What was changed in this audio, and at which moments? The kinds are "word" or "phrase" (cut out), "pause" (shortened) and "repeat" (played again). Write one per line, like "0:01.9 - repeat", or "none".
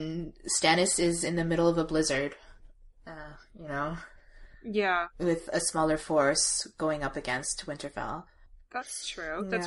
none